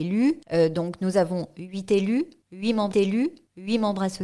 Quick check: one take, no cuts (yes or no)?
no